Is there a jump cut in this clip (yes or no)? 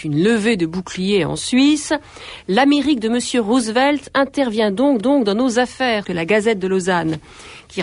yes